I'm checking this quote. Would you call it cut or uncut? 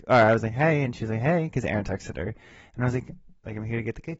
uncut